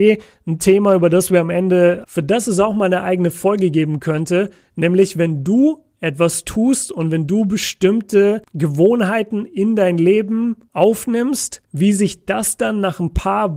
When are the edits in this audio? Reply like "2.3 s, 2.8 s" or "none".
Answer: 2.0 s, 8.5 s, 11.6 s